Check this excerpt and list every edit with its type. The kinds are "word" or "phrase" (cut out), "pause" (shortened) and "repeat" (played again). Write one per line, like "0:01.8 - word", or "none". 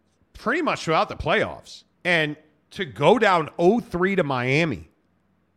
0:01.9 - pause